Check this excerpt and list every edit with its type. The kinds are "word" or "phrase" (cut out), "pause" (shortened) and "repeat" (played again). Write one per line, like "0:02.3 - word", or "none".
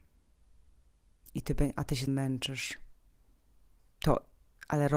0:02.1 - word